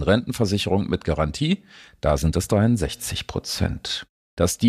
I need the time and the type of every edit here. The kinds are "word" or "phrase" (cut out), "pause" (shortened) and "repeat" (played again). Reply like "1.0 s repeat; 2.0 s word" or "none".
none